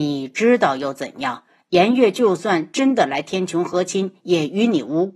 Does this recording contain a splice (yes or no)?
no